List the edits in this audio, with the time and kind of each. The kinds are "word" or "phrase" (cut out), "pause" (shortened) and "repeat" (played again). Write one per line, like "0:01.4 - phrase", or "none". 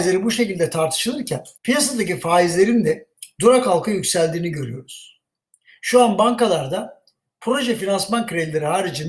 0:01.6 - pause